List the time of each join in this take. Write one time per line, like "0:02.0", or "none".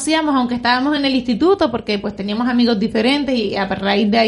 none